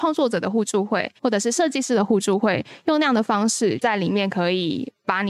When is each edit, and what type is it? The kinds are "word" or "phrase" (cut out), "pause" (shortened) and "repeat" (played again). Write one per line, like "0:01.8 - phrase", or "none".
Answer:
0:01.2 - pause